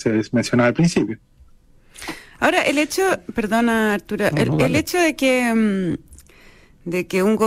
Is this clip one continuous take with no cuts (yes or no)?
yes